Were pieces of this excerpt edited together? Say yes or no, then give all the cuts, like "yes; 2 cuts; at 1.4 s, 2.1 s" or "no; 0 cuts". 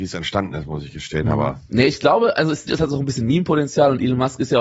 yes; 1 cut; at 2.7 s